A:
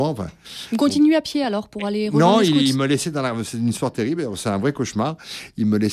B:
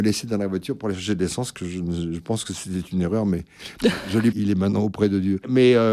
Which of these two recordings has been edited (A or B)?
B